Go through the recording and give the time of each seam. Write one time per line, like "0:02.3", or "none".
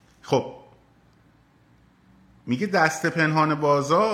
none